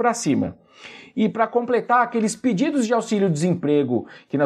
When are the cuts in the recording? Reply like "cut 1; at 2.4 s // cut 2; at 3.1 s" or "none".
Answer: none